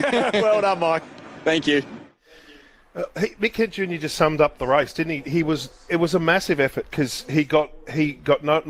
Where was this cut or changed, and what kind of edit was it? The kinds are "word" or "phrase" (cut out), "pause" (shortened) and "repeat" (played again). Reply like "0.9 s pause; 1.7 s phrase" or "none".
3.1 s word; 5.9 s word